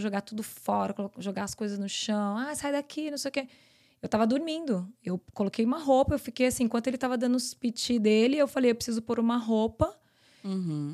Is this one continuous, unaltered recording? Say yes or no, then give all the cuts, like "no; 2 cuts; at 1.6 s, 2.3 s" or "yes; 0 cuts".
yes; 0 cuts